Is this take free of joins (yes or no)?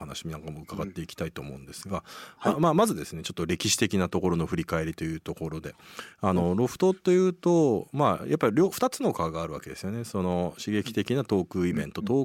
yes